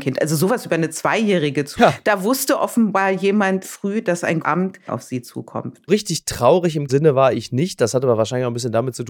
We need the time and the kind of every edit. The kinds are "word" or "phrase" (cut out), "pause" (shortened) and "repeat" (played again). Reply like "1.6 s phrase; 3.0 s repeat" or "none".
1.8 s word; 3.6 s word; 4.4 s word; 4.9 s word; 5.9 s phrase; 6.9 s word